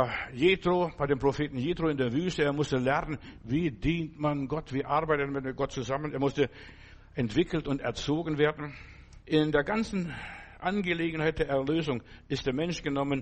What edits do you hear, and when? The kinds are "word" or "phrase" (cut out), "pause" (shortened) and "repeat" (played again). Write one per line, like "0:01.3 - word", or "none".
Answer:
0:09.2 - pause